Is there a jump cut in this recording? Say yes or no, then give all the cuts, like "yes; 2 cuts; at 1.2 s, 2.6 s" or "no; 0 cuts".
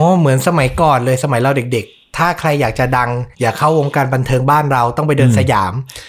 yes; 1 cut; at 3.3 s